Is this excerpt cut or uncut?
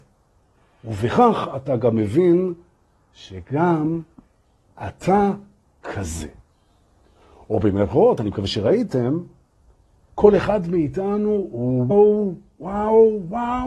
cut